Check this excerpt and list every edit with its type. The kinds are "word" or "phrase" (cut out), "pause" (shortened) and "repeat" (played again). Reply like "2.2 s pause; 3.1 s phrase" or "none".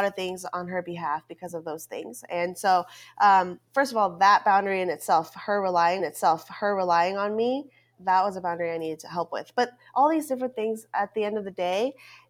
3.7 s pause; 6.0 s repeat; 8.0 s word